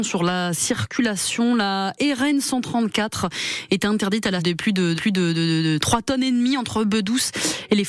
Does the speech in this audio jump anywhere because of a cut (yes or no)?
yes